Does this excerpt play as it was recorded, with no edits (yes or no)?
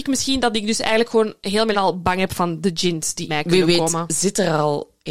no